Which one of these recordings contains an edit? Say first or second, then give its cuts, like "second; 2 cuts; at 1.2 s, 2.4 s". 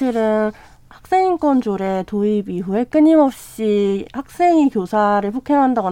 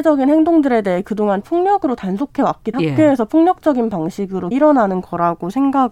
second; 3 cuts; at 1.4 s, 2.7 s, 4.5 s